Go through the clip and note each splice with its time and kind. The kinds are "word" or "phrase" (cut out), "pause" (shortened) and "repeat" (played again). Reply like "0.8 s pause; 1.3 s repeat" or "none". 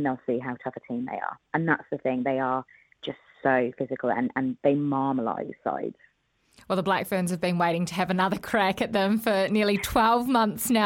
none